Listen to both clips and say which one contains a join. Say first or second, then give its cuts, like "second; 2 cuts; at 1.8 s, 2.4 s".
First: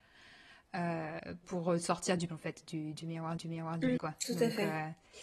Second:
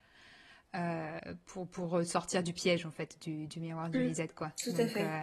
first; 4 cuts; at 1.4 s, 2.3 s, 3.4 s, 4.0 s